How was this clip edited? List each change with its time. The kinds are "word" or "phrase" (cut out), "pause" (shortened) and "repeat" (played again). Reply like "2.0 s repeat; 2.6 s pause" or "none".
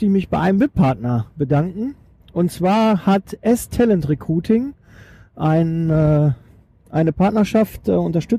none